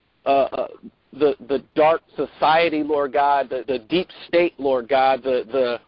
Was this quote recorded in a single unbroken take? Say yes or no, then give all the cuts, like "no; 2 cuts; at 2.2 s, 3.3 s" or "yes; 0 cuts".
no; 2 cuts; at 2.1 s, 3.6 s